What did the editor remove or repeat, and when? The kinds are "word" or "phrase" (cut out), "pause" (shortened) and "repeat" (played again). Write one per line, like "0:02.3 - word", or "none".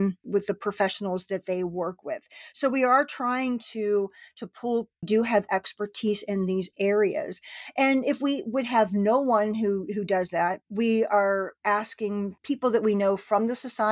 0:05.0 - phrase